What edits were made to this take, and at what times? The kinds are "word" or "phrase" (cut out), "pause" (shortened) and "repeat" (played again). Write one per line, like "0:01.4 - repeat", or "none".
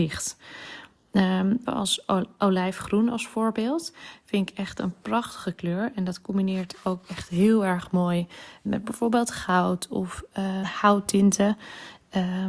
0:01.7 - word
0:08.7 - word
0:10.6 - word